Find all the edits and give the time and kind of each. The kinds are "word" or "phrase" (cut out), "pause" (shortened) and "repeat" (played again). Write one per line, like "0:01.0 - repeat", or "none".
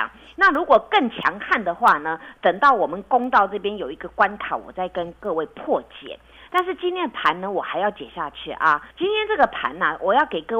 0:08.9 - pause